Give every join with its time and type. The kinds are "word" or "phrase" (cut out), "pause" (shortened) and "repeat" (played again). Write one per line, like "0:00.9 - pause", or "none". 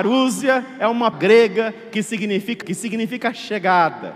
0:01.1 - word
0:02.6 - word